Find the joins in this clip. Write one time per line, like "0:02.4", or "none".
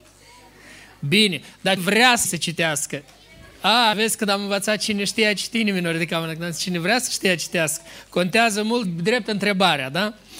0:01.8
0:02.2
0:03.9
0:08.8